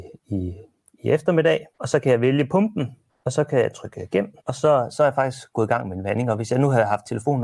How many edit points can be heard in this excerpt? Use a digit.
3